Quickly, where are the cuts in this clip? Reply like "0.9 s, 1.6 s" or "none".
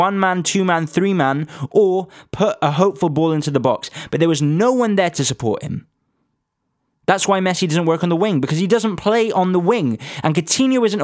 none